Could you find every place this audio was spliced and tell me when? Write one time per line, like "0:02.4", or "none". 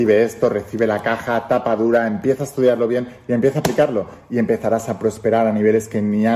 none